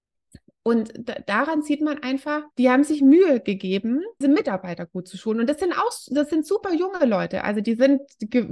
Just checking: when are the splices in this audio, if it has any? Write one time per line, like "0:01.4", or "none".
0:02.5
0:04.2